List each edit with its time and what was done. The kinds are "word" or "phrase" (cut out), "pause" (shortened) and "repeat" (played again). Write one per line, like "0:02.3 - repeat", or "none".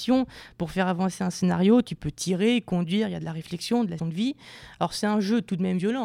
0:04.0 - word